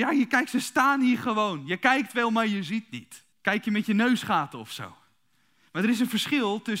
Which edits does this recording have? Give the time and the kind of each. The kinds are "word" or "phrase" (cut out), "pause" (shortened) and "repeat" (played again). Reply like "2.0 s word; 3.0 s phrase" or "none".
3.3 s pause